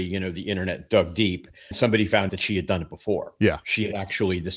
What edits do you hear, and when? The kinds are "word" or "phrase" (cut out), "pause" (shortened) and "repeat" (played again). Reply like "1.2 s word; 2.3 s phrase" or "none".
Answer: 1.7 s word; 2.3 s word

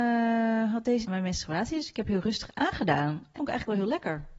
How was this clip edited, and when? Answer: 1.0 s word; 3.3 s word

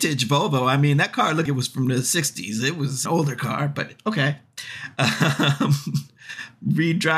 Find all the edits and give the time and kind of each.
1.5 s word; 3.1 s phrase

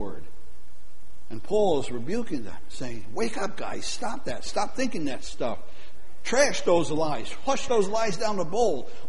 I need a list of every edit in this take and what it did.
none

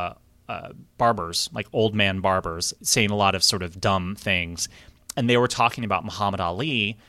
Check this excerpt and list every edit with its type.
2.8 s word

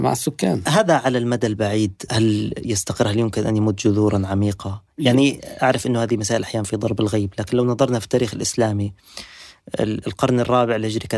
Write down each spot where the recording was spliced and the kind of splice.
2.1 s word

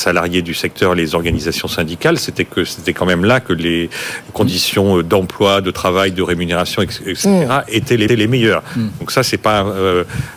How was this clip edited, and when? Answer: 8.1 s repeat

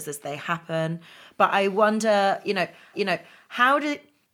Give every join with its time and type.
2.9 s repeat

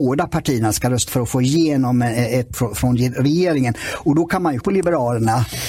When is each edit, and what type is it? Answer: 1.1 s word; 2.5 s word; 4.6 s word

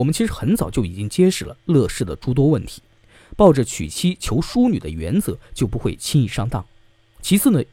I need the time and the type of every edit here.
none

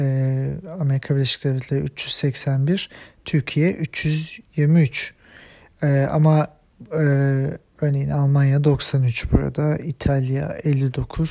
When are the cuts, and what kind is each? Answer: none

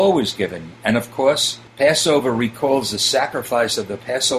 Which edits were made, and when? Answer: 1.7 s pause

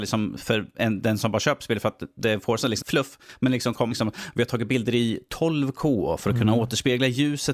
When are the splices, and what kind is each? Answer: 2.8 s word; 3.9 s word

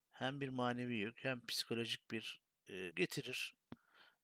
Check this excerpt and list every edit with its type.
2.9 s word

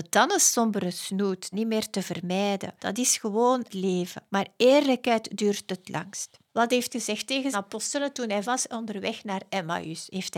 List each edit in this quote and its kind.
1.5 s phrase; 2.8 s pause; 3.7 s word; 4.3 s pause; 6.5 s pause; 6.9 s word; 7.5 s word; 8.4 s word

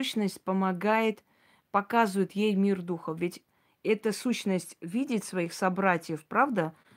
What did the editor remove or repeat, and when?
none

